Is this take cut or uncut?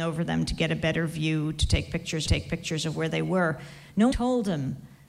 cut